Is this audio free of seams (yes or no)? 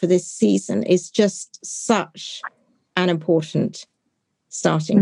yes